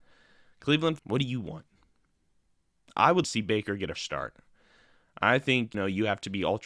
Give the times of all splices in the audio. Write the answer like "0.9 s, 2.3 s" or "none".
1.0 s, 3.2 s, 4.0 s, 5.7 s